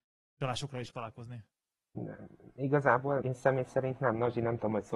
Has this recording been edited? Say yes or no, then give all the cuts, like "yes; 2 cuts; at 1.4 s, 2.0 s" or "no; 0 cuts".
yes; 3 cuts; at 0.9 s, 1.8 s, 3.2 s